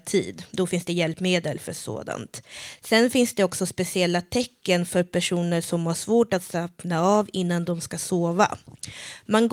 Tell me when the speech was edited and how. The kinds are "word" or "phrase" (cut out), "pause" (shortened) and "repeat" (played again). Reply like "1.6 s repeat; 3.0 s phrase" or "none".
none